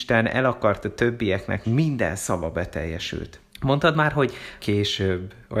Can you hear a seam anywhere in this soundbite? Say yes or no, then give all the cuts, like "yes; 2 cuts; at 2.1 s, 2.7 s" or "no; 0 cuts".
yes; 3 cuts; at 1.6 s, 3.5 s, 4.6 s